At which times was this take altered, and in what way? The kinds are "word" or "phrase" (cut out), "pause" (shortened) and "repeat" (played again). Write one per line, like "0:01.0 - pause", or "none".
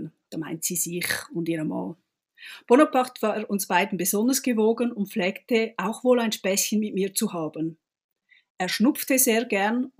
none